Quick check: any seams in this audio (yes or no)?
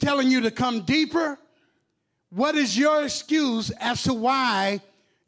no